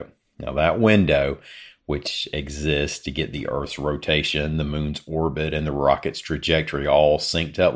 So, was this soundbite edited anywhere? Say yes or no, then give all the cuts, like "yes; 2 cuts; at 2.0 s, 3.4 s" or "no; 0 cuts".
no; 0 cuts